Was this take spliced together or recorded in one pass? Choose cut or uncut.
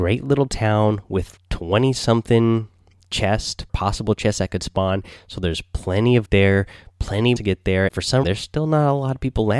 cut